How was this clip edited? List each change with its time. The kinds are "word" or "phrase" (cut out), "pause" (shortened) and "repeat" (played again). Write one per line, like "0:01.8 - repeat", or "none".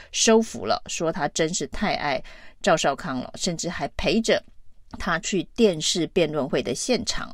0:04.9 - pause